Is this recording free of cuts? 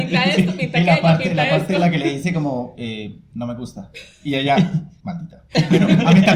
yes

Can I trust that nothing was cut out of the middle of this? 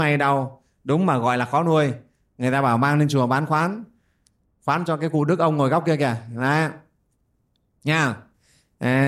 yes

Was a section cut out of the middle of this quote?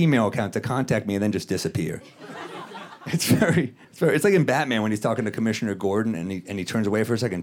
yes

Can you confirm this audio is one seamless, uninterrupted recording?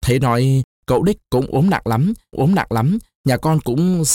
no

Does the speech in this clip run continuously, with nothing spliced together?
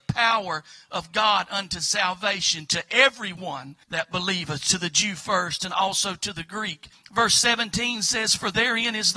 no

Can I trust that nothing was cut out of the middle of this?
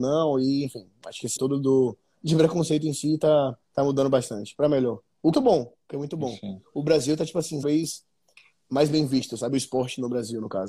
no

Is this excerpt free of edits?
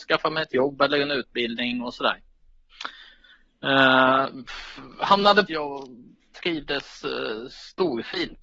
no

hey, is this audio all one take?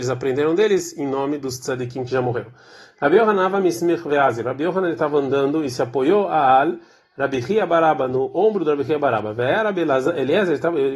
yes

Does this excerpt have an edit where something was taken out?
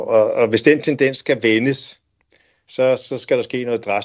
no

